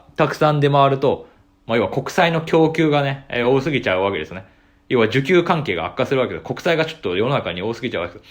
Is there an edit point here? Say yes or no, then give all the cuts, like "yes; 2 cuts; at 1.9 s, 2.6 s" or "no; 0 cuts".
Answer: no; 0 cuts